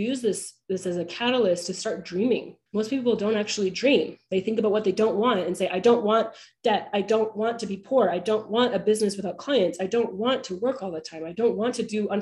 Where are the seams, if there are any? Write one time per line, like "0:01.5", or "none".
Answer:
0:02.7